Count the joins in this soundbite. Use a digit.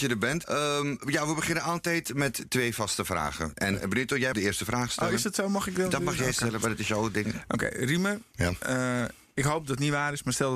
1